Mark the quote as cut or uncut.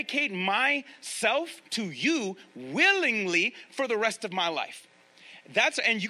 cut